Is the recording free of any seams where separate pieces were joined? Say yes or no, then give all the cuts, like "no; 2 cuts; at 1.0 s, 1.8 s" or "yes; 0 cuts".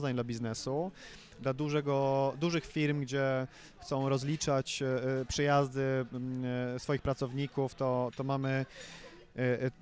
yes; 0 cuts